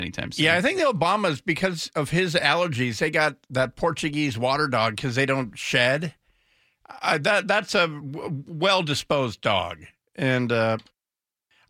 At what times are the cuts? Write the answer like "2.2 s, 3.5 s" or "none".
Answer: none